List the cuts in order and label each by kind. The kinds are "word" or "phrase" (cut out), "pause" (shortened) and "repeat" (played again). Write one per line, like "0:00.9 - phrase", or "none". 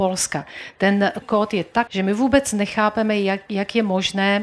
0:01.2 - word
0:01.9 - word